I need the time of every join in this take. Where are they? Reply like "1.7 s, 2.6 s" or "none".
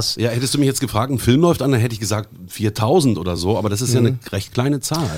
none